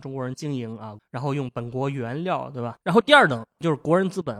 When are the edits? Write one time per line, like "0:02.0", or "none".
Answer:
0:01.0
0:02.8